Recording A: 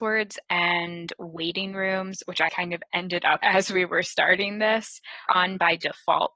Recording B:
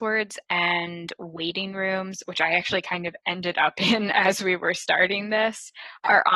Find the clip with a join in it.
A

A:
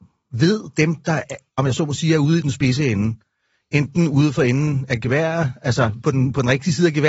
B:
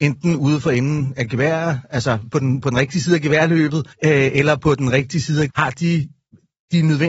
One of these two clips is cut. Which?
B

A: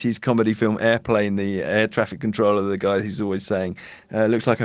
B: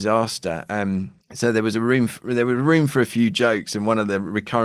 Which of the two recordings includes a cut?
B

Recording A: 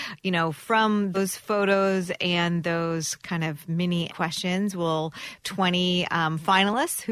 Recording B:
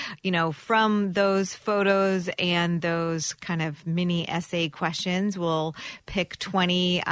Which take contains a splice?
A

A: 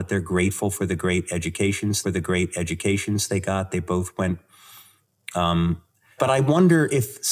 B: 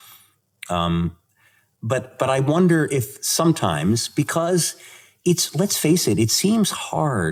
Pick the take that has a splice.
A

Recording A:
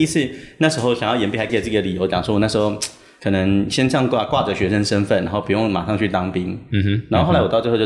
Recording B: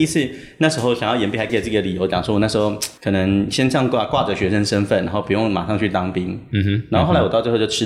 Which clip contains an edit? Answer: B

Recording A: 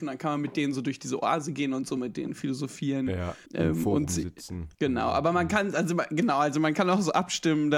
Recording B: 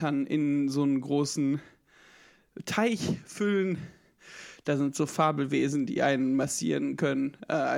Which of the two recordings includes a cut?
A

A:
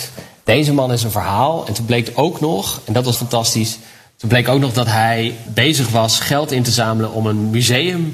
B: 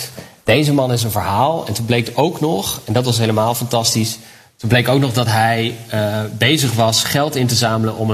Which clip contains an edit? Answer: A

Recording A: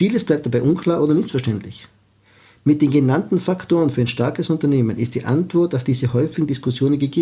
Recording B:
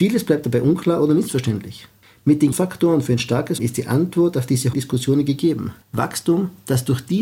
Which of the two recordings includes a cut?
B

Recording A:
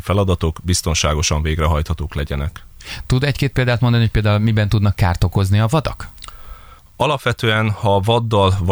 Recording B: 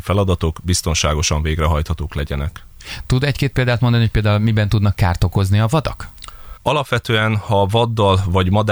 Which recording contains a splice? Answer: B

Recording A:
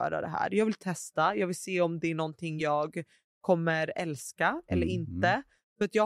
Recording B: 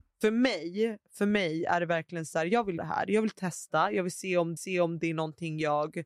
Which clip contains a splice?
B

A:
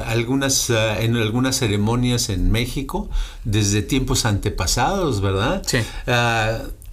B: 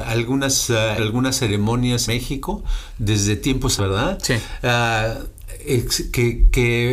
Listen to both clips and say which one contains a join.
B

